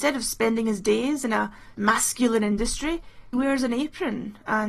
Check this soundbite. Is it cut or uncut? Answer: cut